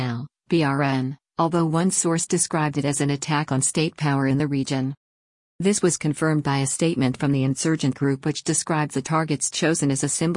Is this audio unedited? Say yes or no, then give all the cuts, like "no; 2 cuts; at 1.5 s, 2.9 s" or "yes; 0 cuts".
yes; 0 cuts